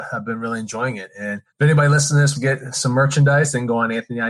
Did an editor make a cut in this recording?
yes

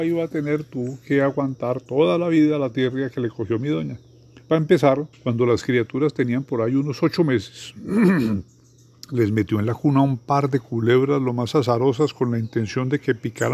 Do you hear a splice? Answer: yes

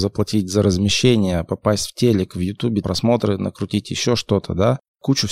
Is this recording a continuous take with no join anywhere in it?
no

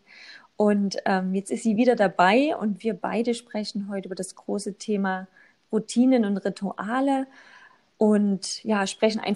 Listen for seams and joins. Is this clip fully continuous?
yes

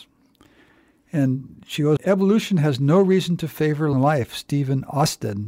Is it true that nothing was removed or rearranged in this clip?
no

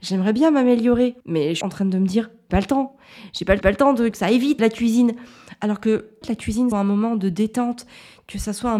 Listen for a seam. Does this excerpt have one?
yes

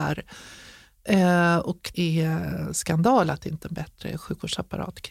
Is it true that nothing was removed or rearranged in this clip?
no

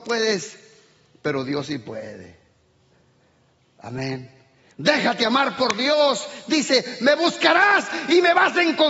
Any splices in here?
no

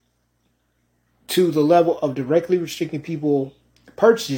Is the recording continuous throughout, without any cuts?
yes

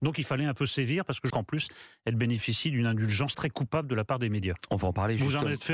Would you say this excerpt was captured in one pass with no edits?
no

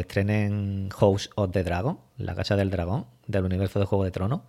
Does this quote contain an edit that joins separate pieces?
no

